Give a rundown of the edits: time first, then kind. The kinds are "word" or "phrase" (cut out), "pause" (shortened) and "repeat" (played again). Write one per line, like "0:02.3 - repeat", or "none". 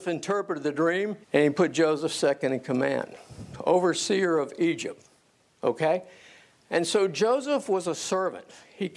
0:01.2 - pause